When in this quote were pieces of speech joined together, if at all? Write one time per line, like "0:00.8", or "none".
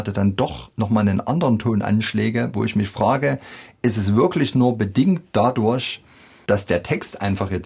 none